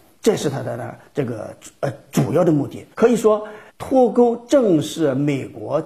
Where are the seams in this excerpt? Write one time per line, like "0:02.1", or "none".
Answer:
0:02.9
0:03.7

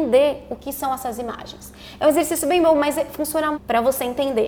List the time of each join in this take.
0:03.5

